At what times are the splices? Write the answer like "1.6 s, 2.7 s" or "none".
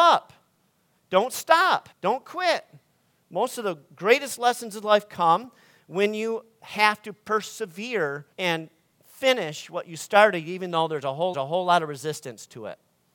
1.9 s, 8.3 s, 11.3 s